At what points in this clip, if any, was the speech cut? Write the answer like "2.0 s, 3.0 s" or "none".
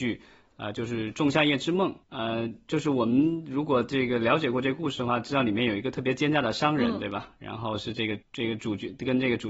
2.0 s, 8.2 s